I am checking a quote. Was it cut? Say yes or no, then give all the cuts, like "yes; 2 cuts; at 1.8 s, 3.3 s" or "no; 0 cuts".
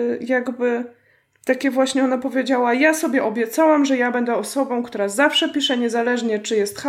no; 0 cuts